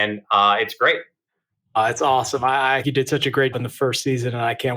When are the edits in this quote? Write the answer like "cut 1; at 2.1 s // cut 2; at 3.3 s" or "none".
cut 1; at 1.3 s // cut 2; at 2.8 s // cut 3; at 3.5 s